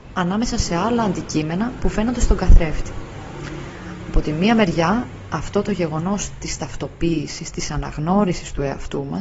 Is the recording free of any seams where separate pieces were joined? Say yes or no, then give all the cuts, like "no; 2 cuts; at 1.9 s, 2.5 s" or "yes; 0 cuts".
yes; 0 cuts